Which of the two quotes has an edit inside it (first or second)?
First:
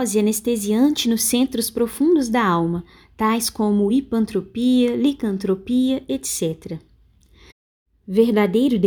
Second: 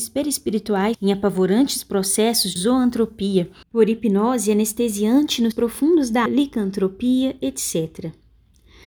second